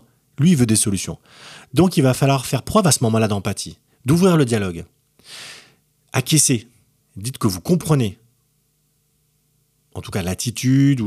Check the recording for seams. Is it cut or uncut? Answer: uncut